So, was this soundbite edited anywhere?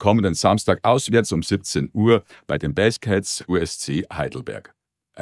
no; 0 cuts

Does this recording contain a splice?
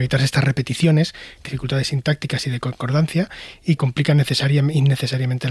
yes; 2 cuts; at 1.4 s, 3.8 s

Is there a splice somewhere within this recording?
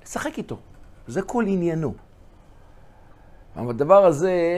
no; 0 cuts

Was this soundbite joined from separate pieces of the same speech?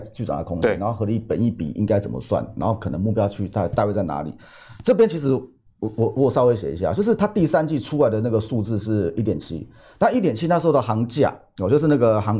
no; 0 cuts

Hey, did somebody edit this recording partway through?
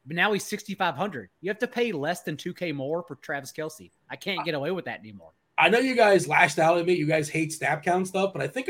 no; 0 cuts

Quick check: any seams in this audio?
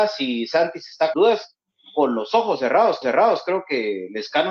yes; 2 cuts; at 1.1 s, 3.0 s

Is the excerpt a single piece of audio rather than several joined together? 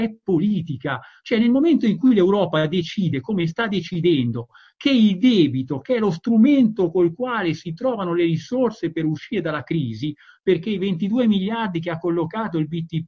yes; 0 cuts

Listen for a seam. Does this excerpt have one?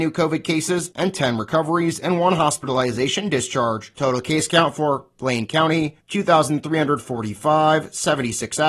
no; 0 cuts

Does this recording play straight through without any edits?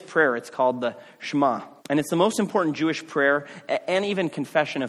no; 1 cut; at 1.8 s

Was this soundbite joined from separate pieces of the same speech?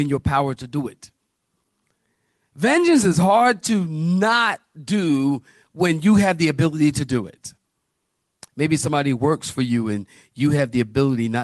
no; 0 cuts

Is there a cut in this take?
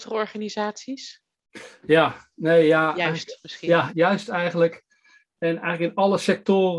yes; 1 cut; at 3.9 s

